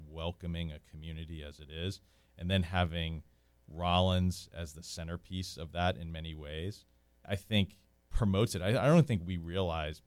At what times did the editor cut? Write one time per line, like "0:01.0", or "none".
0:07.2